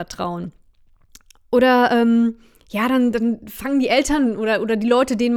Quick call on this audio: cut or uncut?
uncut